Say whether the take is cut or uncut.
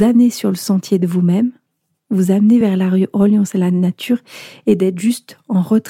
uncut